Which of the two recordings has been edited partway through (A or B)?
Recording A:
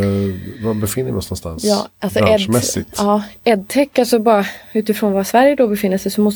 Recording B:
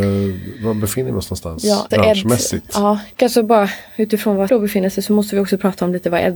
B